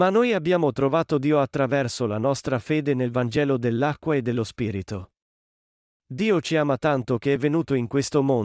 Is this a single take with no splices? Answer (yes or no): yes